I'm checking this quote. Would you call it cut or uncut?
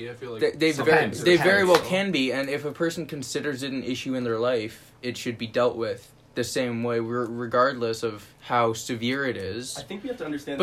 cut